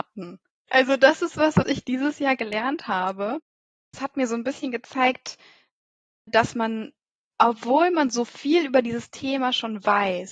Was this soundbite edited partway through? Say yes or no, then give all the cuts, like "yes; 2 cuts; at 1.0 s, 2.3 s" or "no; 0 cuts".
no; 0 cuts